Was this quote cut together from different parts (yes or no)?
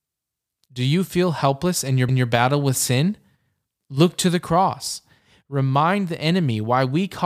yes